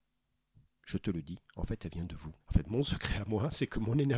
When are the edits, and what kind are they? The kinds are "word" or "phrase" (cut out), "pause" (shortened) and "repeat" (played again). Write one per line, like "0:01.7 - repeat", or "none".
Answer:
0:02.4 - pause